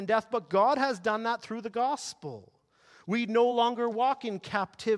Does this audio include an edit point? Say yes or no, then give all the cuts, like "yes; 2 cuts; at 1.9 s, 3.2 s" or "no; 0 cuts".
no; 0 cuts